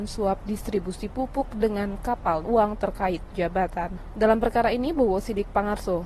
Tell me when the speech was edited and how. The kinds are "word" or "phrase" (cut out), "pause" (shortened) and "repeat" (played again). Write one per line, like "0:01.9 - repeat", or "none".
0:02.4 - phrase